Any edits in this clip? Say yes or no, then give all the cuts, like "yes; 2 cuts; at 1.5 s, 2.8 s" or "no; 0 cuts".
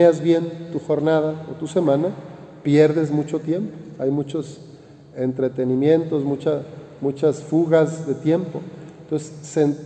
no; 0 cuts